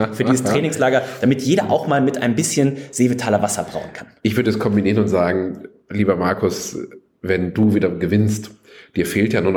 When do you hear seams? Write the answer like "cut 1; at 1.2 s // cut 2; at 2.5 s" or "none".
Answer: none